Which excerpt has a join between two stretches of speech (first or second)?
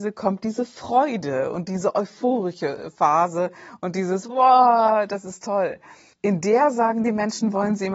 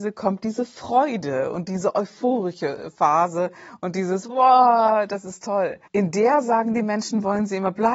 second